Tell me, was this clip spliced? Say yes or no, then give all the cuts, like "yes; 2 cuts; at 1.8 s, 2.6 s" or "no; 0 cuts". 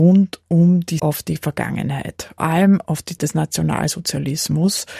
yes; 3 cuts; at 1.0 s, 2.4 s, 3.2 s